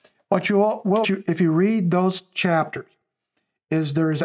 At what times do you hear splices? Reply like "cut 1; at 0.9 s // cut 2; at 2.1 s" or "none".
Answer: cut 1; at 1.0 s